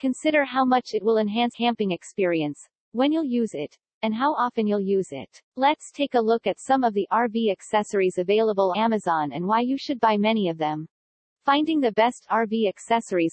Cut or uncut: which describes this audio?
cut